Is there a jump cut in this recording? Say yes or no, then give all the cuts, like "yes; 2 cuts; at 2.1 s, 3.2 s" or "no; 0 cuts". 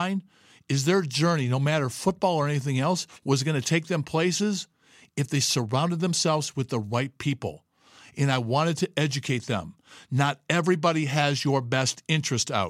no; 0 cuts